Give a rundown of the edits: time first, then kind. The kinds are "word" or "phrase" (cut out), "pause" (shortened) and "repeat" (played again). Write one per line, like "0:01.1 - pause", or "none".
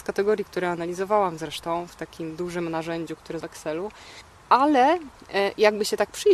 0:03.4 - word